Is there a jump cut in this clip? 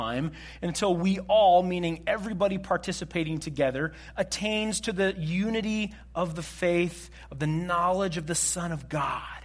no; 0 cuts

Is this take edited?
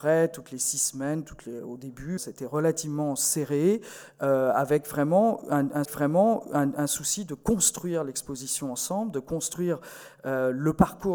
yes; 2 cuts; at 2.2 s, 5.8 s

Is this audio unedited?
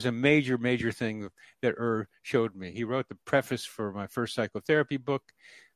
yes; 0 cuts

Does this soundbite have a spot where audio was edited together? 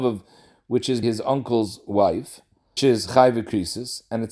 yes; 2 cuts; at 1.0 s, 2.8 s

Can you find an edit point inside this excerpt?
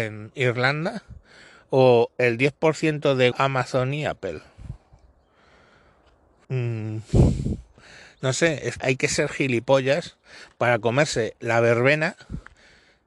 yes; 3 cuts; at 3.3 s, 6.4 s, 8.8 s

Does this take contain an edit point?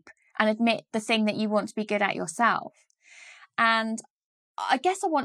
no; 0 cuts

